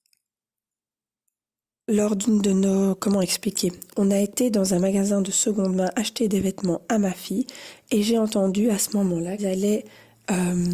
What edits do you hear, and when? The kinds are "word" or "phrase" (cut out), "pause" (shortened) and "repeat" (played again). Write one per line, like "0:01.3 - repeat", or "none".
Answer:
0:09.4 - word